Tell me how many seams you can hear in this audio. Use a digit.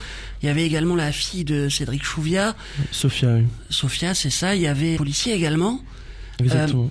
1